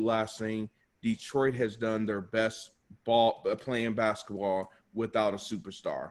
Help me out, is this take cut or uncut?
uncut